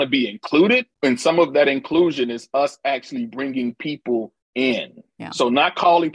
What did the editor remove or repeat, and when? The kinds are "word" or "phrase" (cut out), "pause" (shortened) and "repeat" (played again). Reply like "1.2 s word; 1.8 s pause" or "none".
0.9 s pause; 4.4 s pause